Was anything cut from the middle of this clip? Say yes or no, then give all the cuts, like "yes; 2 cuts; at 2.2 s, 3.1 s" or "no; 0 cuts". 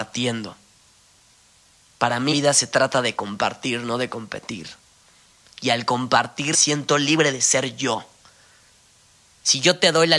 yes; 2 cuts; at 2.3 s, 6.5 s